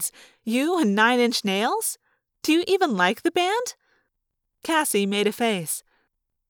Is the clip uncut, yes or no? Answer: yes